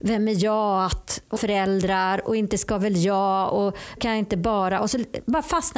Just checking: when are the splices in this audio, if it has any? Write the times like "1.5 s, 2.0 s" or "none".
1.4 s, 4.0 s